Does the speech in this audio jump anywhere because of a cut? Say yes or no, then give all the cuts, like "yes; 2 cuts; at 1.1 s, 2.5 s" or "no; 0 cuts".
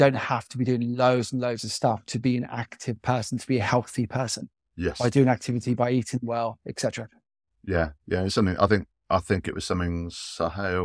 no; 0 cuts